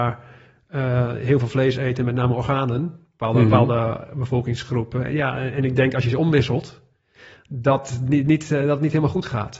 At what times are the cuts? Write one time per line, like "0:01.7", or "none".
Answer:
none